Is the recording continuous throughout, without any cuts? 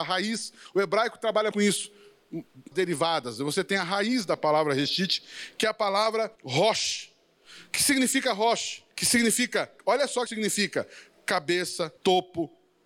no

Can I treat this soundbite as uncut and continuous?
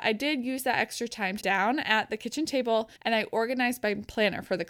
no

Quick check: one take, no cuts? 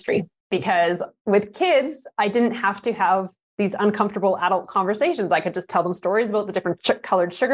yes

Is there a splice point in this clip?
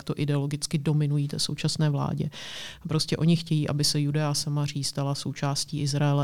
no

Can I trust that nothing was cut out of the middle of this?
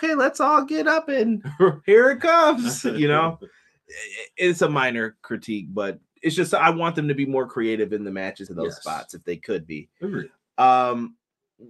no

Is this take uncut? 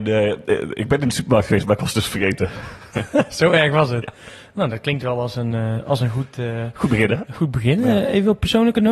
yes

